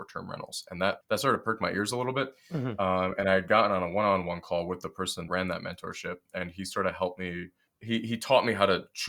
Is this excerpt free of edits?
no; 3 cuts; at 1.0 s, 5.3 s, 7.7 s

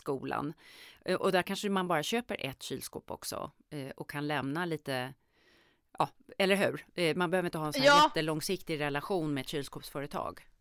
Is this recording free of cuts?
yes; 0 cuts

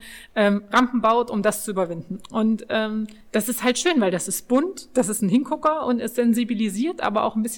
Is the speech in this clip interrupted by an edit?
yes; 1 cut; at 3.2 s

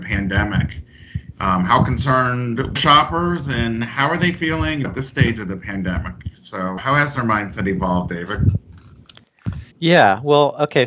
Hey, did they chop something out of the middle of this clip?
yes; 4 cuts; at 2.8 s, 4.8 s, 6.8 s, 9.7 s

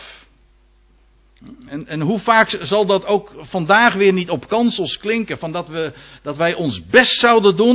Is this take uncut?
yes; 0 cuts

